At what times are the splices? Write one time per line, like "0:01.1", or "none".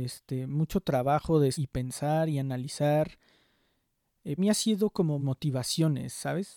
0:01.5
0:04.4
0:05.2